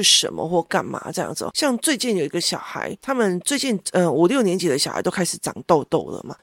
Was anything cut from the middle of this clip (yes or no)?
no